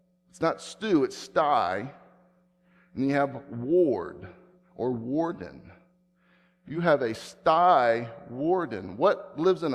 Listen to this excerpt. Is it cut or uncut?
uncut